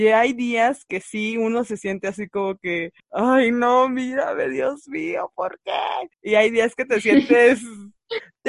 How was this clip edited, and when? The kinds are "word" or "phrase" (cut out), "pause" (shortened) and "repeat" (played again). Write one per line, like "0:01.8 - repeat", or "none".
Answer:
0:03.0 - pause
0:06.1 - pause